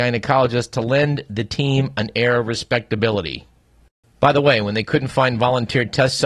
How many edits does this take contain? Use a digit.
0